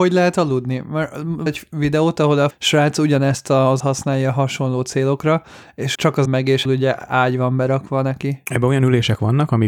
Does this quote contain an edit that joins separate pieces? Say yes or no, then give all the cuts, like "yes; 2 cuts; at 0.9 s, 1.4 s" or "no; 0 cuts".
yes; 6 cuts; at 1.5 s, 2.5 s, 3.8 s, 5.9 s, 6.2 s, 6.6 s